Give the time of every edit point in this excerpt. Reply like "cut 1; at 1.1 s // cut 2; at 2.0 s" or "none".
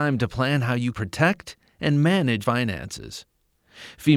cut 1; at 0.9 s // cut 2; at 2.4 s